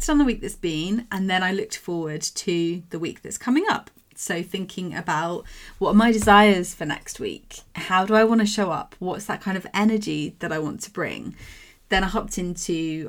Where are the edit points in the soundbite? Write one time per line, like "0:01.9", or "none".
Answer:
none

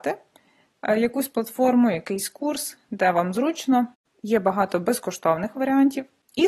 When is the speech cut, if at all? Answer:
none

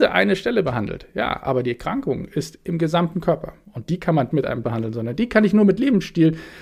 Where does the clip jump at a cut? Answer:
0:04.3
0:04.6

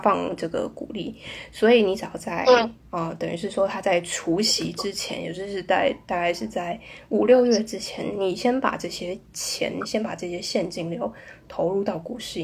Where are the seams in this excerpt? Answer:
none

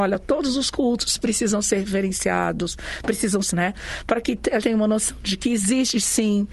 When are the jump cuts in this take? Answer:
0:03.5
0:04.6

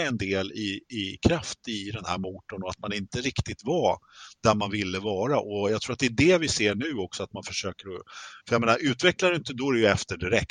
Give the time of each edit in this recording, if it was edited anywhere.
0:08.4

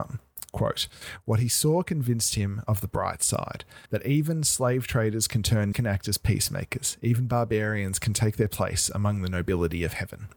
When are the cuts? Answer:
0:03.8
0:05.7

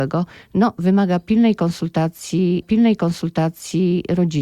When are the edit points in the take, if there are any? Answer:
0:02.6

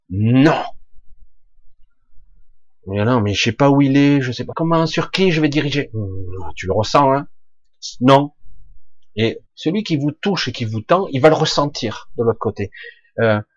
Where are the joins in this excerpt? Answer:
0:04.5
0:09.5

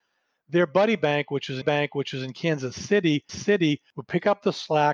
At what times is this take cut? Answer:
0:01.6
0:03.3

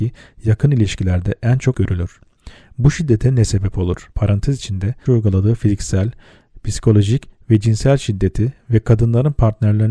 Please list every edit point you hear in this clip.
0:01.7
0:04.1
0:05.1

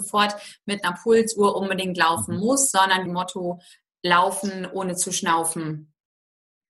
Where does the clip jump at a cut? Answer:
0:03.1

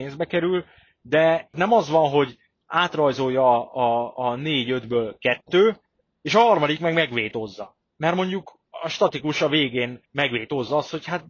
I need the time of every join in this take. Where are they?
0:08.6
0:10.1

